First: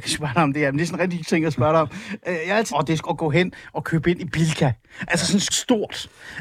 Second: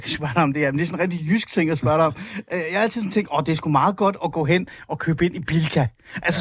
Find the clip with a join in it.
first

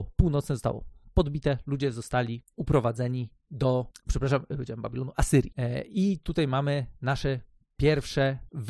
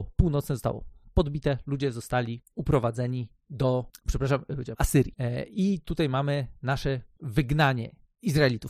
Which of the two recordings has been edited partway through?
second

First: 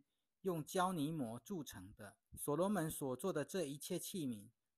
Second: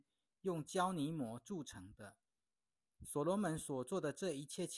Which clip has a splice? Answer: first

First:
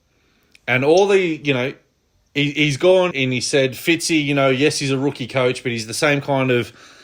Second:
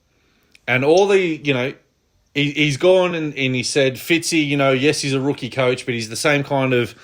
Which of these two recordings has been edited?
first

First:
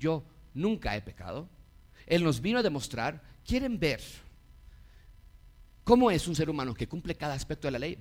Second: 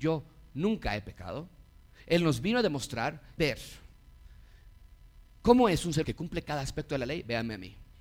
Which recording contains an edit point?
second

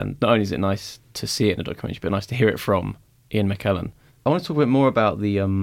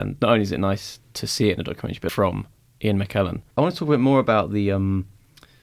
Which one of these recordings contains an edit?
second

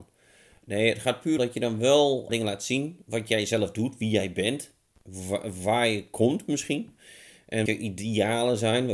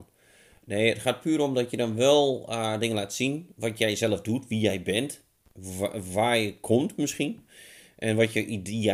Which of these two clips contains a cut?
first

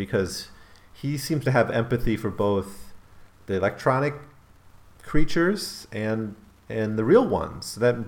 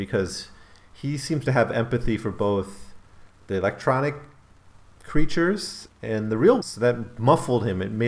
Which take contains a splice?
second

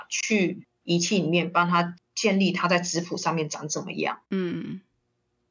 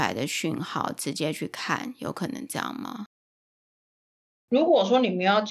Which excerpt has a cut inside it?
first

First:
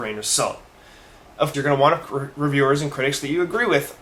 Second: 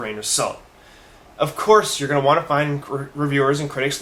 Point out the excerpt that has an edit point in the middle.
first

